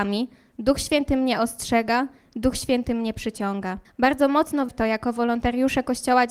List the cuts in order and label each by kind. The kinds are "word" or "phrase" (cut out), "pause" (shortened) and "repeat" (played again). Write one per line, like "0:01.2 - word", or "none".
0:03.8 - pause
0:04.7 - word